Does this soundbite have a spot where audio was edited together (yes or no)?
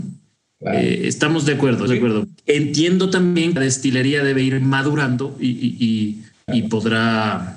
yes